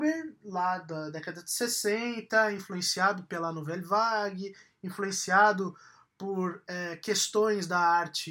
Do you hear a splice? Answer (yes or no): no